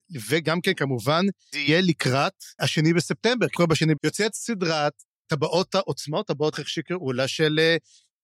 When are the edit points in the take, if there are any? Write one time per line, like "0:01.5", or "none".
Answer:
0:01.5
0:02.6
0:03.5
0:04.0
0:05.3
0:06.5